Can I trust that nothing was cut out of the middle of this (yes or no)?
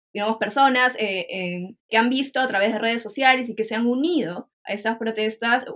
no